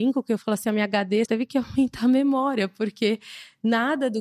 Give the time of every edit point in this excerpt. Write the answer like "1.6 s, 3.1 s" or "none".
1.3 s

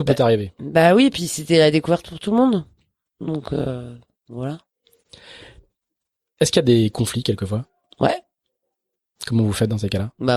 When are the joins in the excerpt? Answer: none

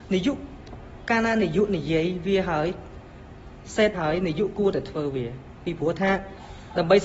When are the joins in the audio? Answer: 3.9 s

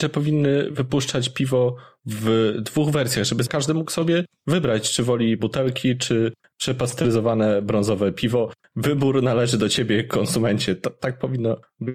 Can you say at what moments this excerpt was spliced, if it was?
5.4 s

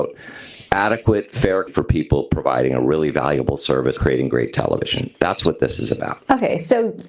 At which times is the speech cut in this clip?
1.7 s, 4.0 s

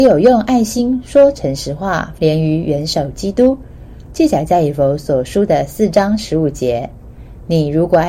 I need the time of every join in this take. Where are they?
2.2 s

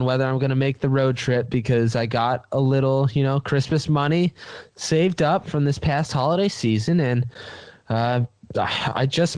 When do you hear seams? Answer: 5.4 s

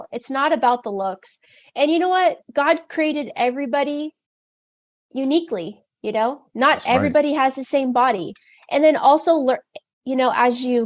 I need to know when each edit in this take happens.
none

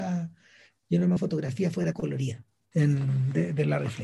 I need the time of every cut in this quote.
1.2 s, 1.9 s, 2.7 s

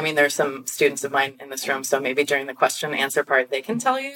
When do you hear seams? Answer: none

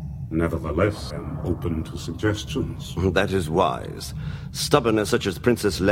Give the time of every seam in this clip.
1.1 s

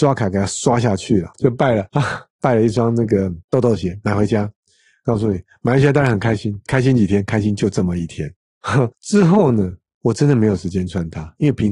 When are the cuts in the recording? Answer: 1.3 s, 3.4 s, 8.9 s

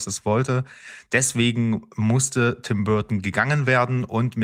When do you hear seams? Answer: none

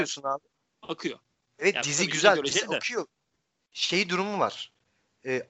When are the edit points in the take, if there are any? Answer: none

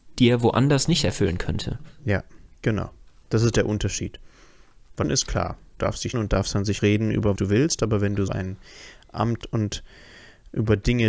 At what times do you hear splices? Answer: 5.0 s, 5.8 s, 6.1 s, 6.8 s, 7.4 s, 8.3 s, 9.4 s

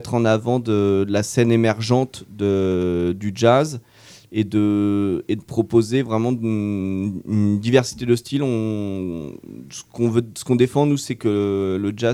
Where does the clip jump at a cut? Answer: none

